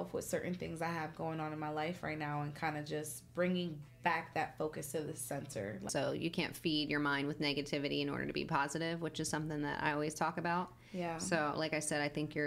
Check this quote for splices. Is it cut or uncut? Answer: uncut